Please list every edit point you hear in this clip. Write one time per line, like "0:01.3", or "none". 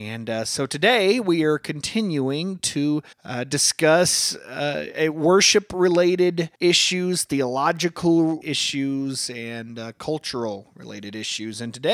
0:03.1
0:06.5
0:08.4